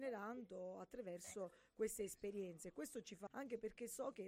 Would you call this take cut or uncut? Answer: cut